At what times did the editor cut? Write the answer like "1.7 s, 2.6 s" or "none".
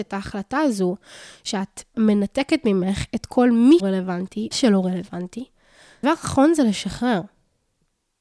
1.9 s, 3.8 s, 4.5 s, 6.0 s